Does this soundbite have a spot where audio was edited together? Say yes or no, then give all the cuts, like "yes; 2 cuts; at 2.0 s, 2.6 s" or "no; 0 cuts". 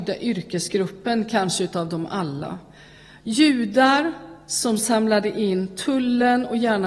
no; 0 cuts